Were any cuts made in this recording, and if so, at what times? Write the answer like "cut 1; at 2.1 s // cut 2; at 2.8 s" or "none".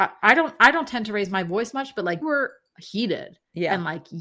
cut 1; at 2.2 s